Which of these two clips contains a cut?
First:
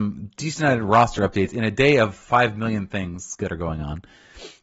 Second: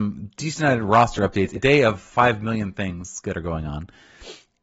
second; 1 cut; at 1.6 s

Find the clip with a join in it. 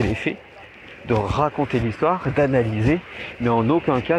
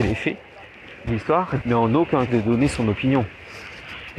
second; 3 cuts; at 1.1 s, 1.6 s, 2.3 s

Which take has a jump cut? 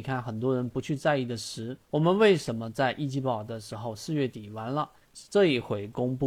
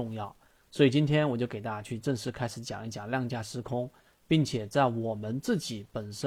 first; 1 cut; at 1.8 s

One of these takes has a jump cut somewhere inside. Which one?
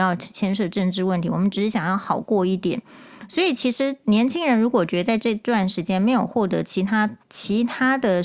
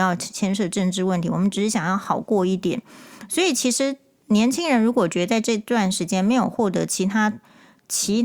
first; 2 cuts; at 4.0 s, 7.2 s

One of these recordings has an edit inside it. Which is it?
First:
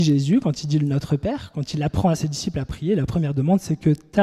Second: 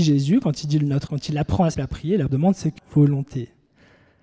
second; 4 cuts; at 1.1 s, 1.7 s, 2.3 s, 2.8 s

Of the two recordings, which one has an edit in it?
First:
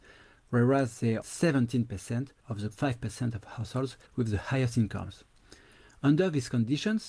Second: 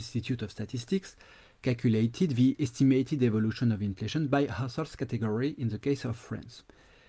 first; 4 cuts; at 1.2 s, 2.4 s, 2.7 s, 4.1 s

